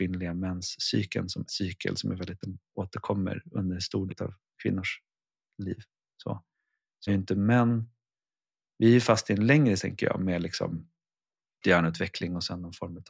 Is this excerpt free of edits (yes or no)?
no